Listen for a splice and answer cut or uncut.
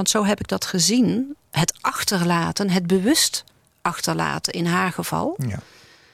uncut